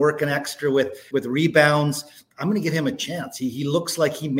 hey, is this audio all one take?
no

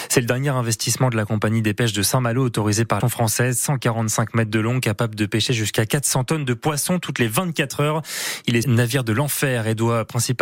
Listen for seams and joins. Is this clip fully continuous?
no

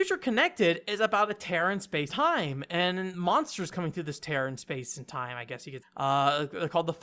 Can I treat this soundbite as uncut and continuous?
no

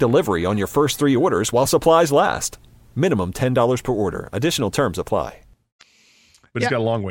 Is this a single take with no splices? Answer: yes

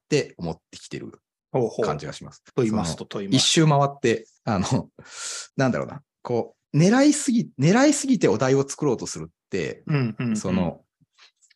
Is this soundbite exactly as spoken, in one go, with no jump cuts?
no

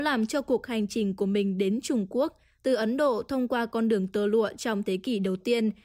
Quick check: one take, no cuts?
yes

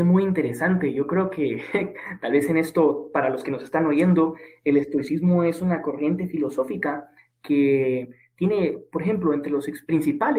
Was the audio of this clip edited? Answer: no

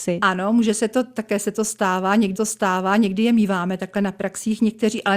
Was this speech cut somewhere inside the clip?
yes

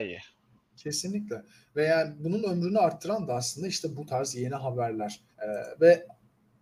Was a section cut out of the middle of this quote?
yes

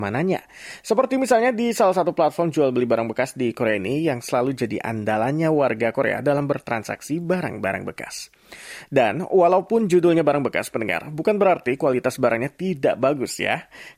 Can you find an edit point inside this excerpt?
no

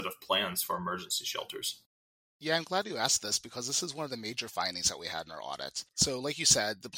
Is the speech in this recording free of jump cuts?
yes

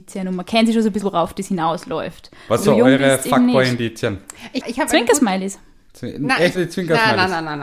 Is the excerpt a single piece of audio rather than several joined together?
no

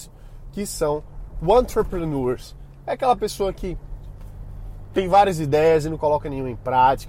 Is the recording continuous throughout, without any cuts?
yes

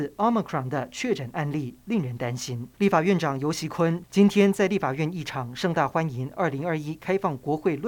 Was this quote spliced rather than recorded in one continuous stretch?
yes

